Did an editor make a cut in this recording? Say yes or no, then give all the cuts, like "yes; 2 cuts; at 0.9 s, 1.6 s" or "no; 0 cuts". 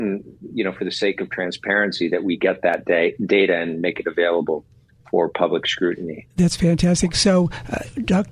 no; 0 cuts